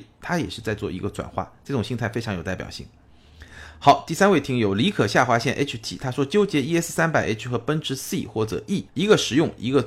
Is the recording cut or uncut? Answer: cut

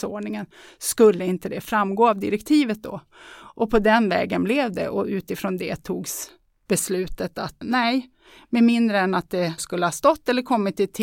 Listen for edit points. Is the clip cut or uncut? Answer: cut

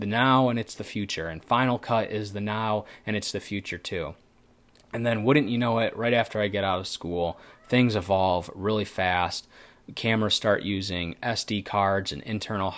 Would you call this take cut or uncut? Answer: uncut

